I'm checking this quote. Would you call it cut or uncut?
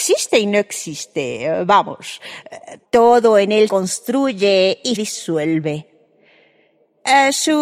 cut